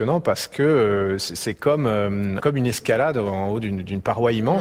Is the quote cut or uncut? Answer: cut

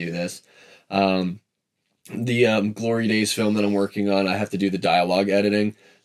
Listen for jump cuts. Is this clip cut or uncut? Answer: uncut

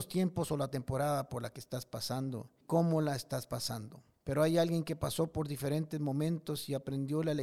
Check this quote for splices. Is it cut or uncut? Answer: cut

